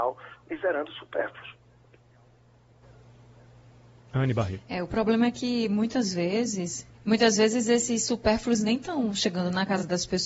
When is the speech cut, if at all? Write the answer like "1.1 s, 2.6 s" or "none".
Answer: 6.9 s